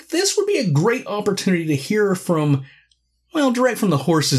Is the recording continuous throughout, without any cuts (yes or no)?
yes